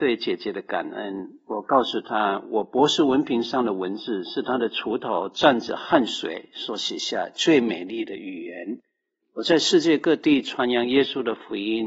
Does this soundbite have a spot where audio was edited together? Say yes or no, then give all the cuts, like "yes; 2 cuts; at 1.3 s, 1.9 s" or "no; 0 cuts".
no; 0 cuts